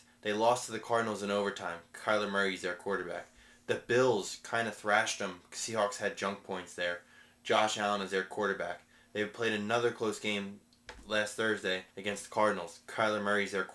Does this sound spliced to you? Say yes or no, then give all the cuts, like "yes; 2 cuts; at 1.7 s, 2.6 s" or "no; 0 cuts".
yes; 1 cut; at 11.9 s